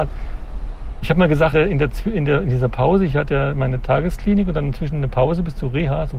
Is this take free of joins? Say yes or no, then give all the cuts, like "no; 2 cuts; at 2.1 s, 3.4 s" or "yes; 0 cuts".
no; 1 cut; at 1.5 s